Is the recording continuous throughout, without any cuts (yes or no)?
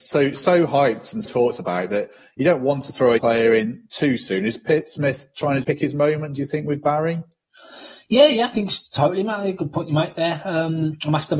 no